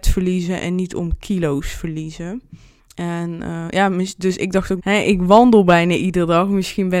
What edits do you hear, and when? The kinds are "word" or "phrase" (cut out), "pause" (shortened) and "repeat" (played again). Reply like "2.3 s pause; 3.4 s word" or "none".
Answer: 2.8 s pause; 4.8 s word